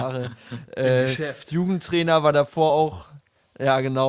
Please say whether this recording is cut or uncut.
uncut